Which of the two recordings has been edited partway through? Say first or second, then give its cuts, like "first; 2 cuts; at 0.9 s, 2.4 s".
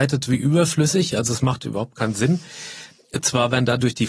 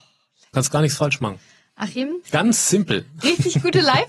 second; 1 cut; at 2.2 s